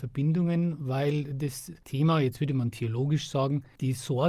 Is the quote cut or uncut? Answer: uncut